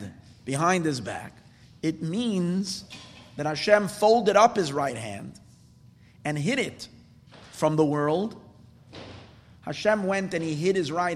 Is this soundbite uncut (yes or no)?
yes